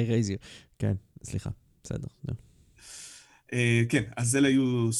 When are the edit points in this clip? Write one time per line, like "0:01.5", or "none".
none